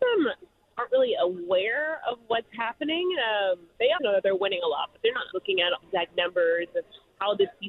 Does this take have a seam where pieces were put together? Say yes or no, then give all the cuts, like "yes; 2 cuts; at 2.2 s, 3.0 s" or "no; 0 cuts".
yes; 3 cuts; at 4.0 s, 5.3 s, 5.8 s